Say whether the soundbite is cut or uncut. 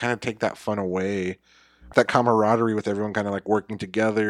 cut